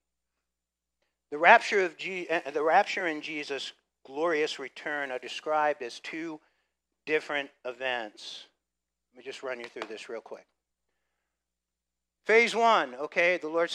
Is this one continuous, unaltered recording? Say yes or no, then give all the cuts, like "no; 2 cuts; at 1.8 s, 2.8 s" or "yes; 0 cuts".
yes; 0 cuts